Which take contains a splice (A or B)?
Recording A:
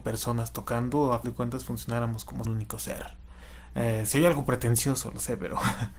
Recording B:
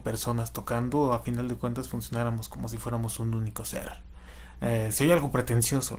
A